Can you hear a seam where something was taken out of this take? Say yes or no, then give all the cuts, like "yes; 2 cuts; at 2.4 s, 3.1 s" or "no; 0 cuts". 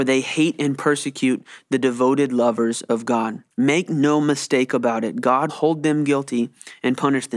yes; 2 cuts; at 3.5 s, 5.5 s